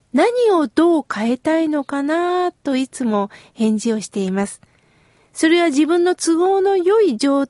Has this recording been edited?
no; 0 cuts

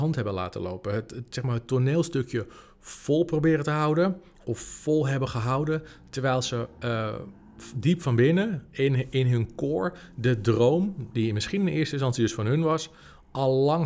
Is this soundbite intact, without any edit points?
yes; 0 cuts

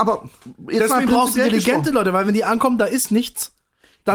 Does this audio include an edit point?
no; 0 cuts

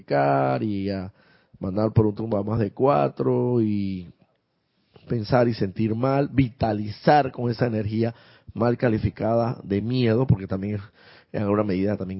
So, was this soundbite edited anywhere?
no; 0 cuts

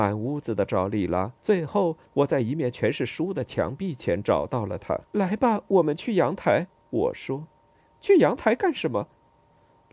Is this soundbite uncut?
no; 2 cuts; at 1.4 s, 5.1 s

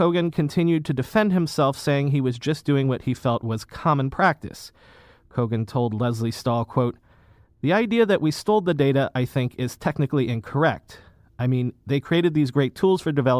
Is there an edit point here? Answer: no; 0 cuts

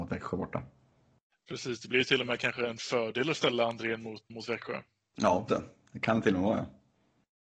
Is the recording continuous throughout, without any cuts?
no; 2 cuts; at 4.3 s, 5.5 s

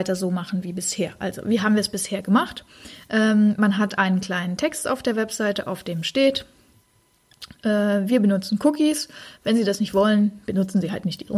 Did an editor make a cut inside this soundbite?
no; 0 cuts

